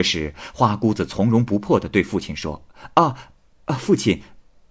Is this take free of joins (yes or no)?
yes